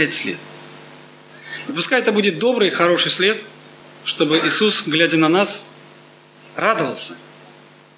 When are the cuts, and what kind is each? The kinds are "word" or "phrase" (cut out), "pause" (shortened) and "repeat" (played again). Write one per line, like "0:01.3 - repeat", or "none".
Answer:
none